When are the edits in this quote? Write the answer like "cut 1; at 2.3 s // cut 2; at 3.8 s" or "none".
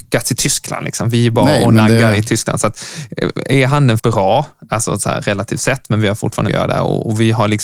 cut 1; at 4.0 s // cut 2; at 6.5 s